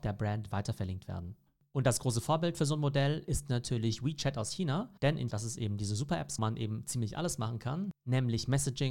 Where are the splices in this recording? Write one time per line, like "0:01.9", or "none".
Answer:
0:05.0
0:05.3
0:06.4